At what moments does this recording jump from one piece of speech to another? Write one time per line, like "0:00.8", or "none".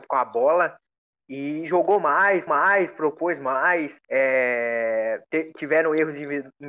0:02.5
0:04.0